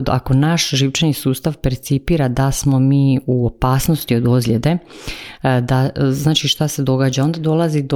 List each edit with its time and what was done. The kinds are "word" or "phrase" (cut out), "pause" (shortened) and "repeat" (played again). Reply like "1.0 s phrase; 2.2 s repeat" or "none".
none